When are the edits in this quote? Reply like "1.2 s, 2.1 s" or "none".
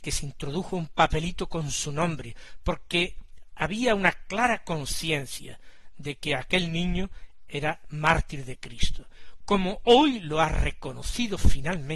none